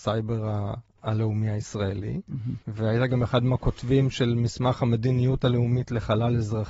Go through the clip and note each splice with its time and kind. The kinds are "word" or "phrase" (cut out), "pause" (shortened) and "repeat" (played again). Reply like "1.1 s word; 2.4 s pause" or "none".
2.6 s pause

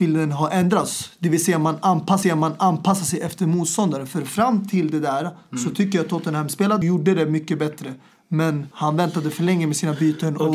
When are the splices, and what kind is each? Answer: 2.2 s repeat; 6.8 s phrase; 8.7 s pause

